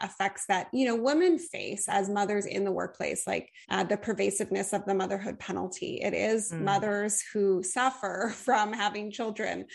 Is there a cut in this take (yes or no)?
yes